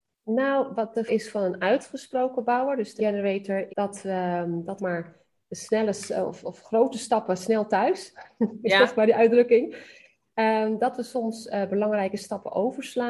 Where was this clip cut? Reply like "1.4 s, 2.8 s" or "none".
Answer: 1.1 s, 3.0 s, 3.7 s, 4.8 s